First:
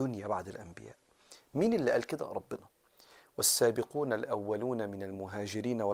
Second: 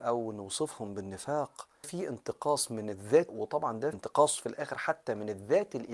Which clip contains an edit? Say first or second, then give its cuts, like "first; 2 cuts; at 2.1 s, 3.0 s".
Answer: second; 3 cuts; at 1.8 s, 3.3 s, 3.9 s